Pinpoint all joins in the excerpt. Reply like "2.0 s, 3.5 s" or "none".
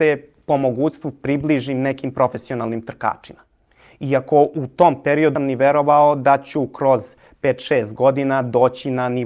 5.4 s